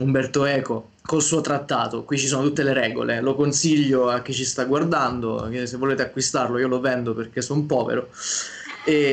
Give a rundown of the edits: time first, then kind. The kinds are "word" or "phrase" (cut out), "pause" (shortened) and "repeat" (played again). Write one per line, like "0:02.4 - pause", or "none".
0:01.0 - pause